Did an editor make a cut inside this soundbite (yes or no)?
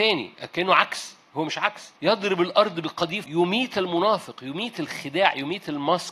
yes